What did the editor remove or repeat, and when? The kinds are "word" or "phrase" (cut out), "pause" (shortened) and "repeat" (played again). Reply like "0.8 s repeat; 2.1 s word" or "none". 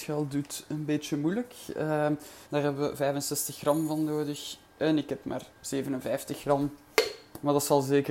2.4 s pause; 4.6 s pause; 5.5 s pause